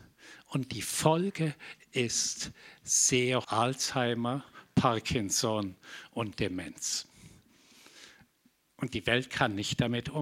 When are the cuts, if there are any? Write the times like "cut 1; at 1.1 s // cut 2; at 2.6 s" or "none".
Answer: cut 1; at 3.4 s

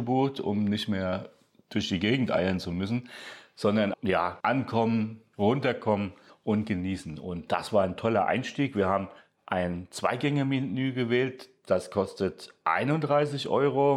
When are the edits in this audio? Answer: cut 1; at 3.9 s // cut 2; at 4.4 s

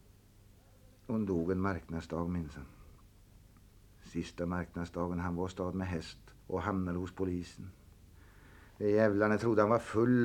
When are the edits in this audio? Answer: cut 1; at 6.4 s

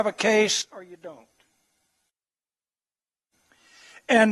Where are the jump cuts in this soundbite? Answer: none

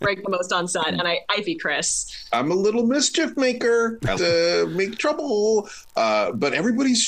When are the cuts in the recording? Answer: cut 1; at 1.4 s // cut 2; at 4.2 s

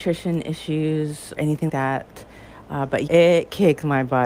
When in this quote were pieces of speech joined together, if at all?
cut 1; at 1.4 s // cut 2; at 1.7 s // cut 3; at 3.1 s

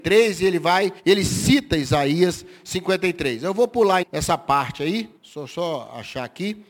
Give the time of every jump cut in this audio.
cut 1; at 1.0 s // cut 2; at 4.0 s // cut 3; at 5.2 s

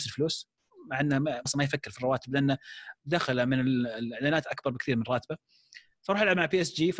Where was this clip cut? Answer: cut 1; at 1.5 s

